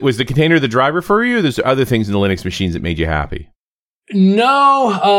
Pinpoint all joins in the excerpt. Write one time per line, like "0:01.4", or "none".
none